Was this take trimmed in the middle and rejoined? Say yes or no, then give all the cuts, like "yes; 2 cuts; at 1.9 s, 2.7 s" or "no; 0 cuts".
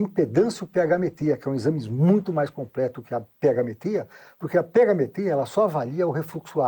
no; 0 cuts